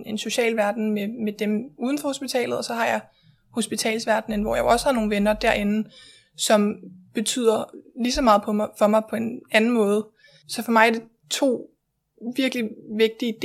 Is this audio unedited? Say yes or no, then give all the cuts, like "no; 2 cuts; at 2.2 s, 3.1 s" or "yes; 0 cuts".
yes; 0 cuts